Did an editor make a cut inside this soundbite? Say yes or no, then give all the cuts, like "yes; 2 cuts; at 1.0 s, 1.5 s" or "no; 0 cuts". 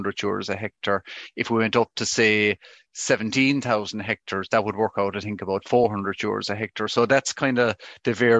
no; 0 cuts